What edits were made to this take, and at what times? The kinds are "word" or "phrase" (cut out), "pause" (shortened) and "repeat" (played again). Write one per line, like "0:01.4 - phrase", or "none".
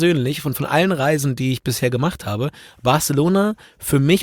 none